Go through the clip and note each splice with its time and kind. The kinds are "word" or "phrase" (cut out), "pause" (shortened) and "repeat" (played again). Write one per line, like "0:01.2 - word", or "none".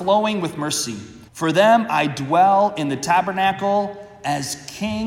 0:01.3 - pause